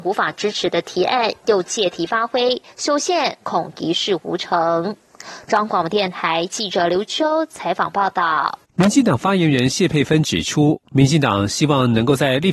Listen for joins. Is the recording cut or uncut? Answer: cut